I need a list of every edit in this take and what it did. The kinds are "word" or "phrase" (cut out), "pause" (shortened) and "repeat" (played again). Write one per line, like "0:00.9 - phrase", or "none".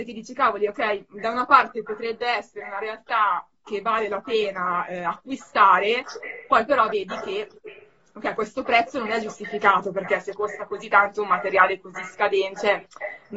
none